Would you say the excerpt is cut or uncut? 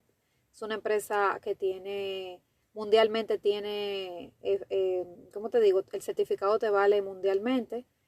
uncut